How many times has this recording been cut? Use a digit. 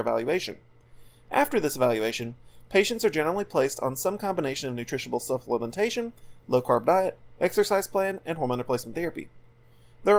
0